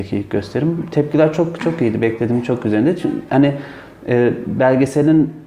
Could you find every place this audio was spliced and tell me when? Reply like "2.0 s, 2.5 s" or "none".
none